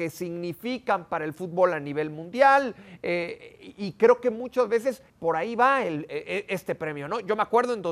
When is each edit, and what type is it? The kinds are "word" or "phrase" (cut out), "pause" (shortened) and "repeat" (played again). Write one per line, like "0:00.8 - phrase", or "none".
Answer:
0:05.1 - pause

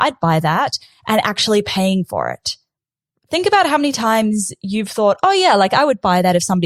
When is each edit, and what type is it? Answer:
none

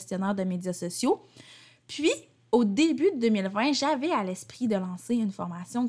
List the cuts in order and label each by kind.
none

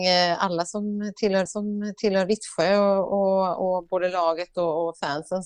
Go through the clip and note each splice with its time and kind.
0:01.5 - repeat

